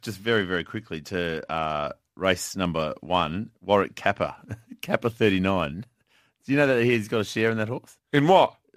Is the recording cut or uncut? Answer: uncut